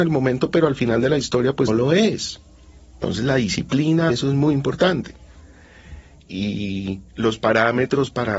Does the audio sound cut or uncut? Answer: cut